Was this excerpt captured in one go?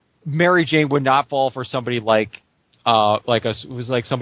yes; 0 cuts

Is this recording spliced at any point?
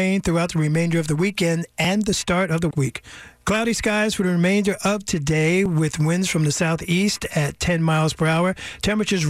yes; 1 cut; at 2.7 s

